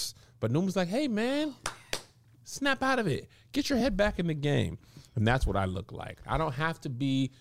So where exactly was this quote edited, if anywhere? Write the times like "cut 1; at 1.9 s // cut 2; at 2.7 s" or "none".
none